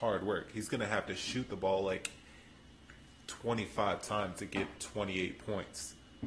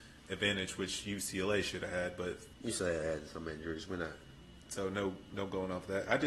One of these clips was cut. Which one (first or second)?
second